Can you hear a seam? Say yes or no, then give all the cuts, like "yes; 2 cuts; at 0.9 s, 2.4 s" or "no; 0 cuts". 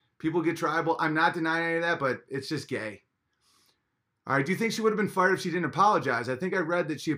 no; 0 cuts